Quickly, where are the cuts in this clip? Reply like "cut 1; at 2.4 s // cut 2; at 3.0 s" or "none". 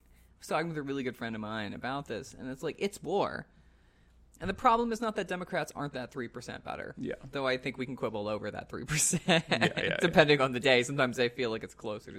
none